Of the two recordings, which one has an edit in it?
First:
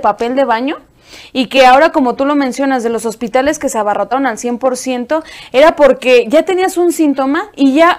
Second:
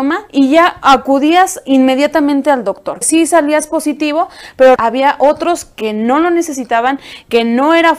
second; 2 cuts; at 3.0 s, 4.8 s

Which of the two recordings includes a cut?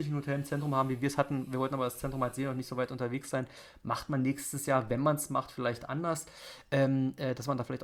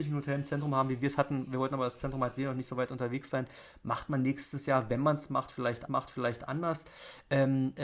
second; 1 cut; at 5.9 s

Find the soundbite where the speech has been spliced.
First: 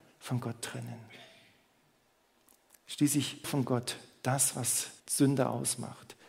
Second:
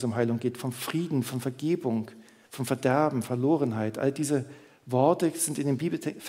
first; 2 cuts; at 3.4 s, 5.0 s

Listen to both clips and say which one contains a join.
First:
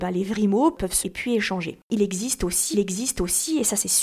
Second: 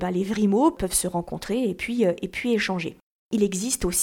first; 3 cuts; at 1.0 s, 1.8 s, 2.7 s

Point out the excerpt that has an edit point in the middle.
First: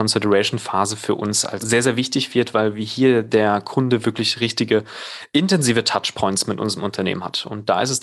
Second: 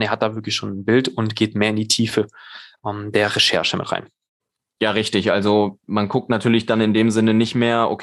first; 1 cut; at 1.6 s

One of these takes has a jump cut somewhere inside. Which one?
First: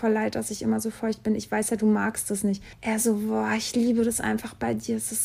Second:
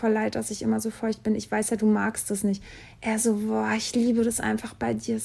first; 1 cut; at 2.7 s

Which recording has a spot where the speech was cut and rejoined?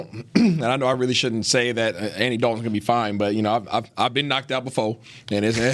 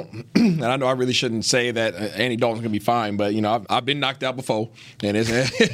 second; 1 cut; at 3.6 s

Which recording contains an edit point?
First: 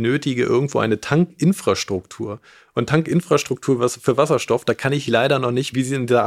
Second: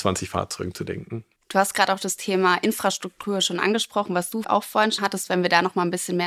second; 2 cuts; at 4.4 s, 5.0 s

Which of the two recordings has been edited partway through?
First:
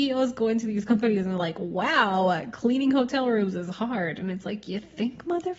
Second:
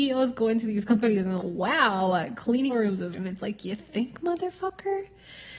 second; 3 cuts; at 1.4 s, 2.7 s, 3.1 s

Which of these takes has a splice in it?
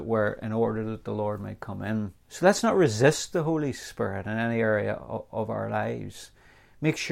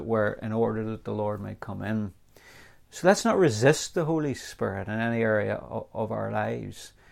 first; 1 cut; at 2.2 s

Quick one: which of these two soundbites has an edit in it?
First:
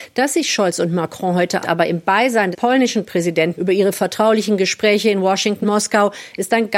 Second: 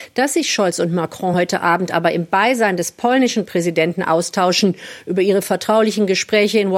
first; 4 cuts; at 1.6 s, 2.5 s, 3.5 s, 5.6 s

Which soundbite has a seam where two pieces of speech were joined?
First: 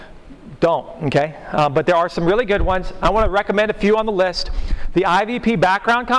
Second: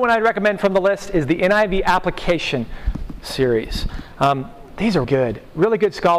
second; 1 cut; at 5.0 s

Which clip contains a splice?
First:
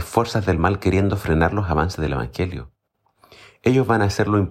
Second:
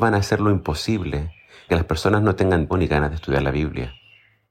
second; 2 cuts; at 1.7 s, 2.7 s

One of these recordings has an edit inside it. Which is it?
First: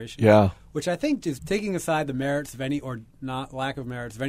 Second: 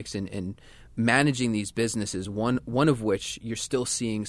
first; 1 cut; at 1.4 s

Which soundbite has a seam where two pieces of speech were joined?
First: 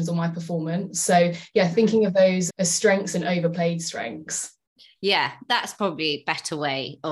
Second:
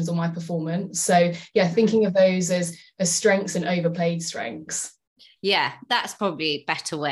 first; 1 cut; at 2.5 s

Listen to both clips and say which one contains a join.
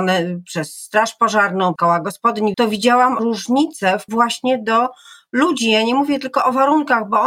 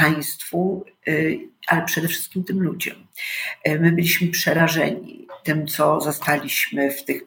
first; 4 cuts; at 1.8 s, 2.5 s, 3.2 s, 4.1 s

